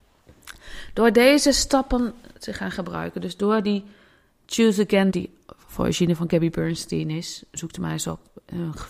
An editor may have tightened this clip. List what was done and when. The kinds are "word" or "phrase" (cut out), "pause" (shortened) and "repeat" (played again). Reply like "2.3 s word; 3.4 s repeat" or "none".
5.1 s word